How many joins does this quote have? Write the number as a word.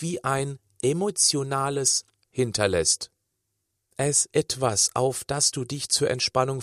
two